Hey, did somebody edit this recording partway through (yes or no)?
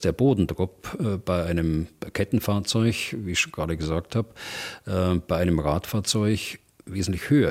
no